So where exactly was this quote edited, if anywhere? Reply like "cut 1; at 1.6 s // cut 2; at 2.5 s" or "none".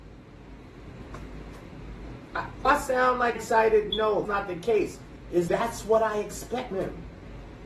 cut 1; at 2.6 s // cut 2; at 3.3 s // cut 3; at 4.2 s // cut 4; at 5.5 s // cut 5; at 6.7 s